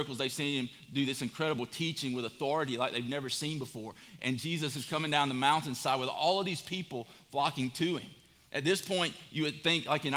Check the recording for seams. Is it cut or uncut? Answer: uncut